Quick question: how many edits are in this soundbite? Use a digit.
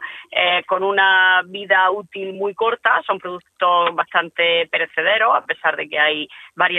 0